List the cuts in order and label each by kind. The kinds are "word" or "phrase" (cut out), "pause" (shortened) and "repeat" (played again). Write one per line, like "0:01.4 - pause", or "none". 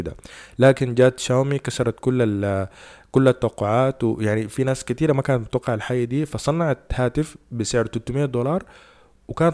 none

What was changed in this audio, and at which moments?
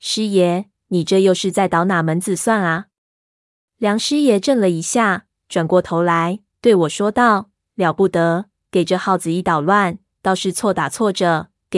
none

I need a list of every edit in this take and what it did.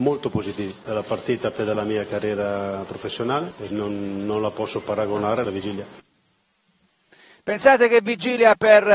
0:01.6 - word
0:03.7 - word
0:05.4 - word

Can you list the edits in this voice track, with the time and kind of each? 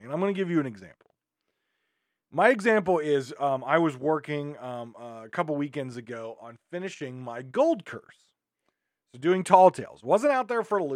none

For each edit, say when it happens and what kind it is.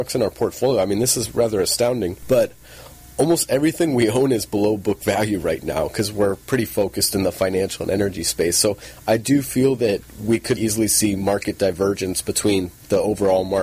0:10.6 - word

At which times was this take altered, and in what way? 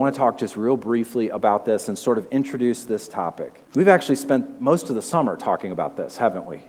0:03.6 - pause

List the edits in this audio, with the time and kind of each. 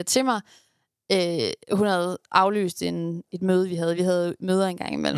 none

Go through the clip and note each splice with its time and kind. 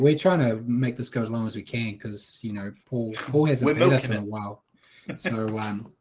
none

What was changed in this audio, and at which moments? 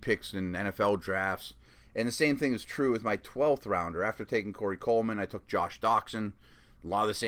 none

